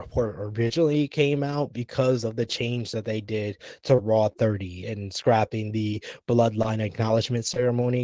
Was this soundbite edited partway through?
no; 0 cuts

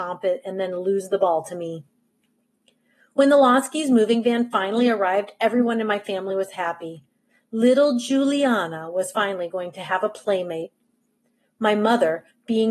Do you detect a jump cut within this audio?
no; 0 cuts

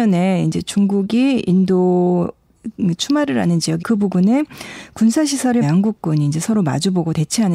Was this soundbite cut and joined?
yes; 2 cuts; at 3.8 s, 5.6 s

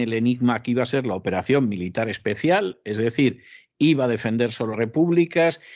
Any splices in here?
yes; 1 cut; at 4.7 s

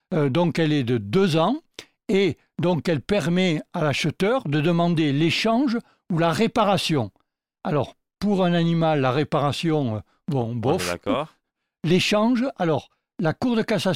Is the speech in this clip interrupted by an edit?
no; 0 cuts

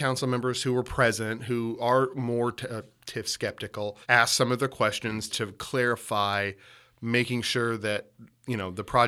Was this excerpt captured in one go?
no; 2 cuts; at 4.0 s, 5.3 s

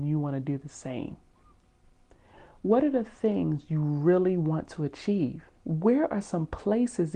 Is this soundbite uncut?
no; 1 cut; at 5.6 s

